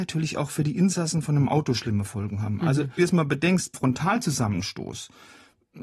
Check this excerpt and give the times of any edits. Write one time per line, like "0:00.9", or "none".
0:03.0
0:03.7